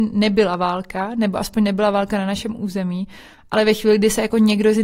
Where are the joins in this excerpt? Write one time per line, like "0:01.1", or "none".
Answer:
none